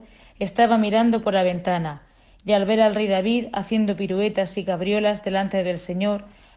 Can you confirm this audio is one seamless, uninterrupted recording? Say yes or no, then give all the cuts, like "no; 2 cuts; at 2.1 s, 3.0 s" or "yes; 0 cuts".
yes; 0 cuts